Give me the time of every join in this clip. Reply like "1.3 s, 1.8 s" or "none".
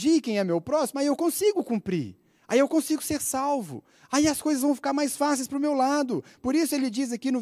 none